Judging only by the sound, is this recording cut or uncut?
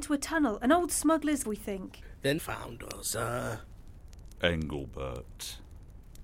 cut